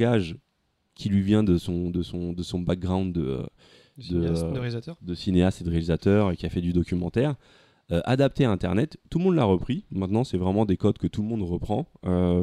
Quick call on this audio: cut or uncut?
uncut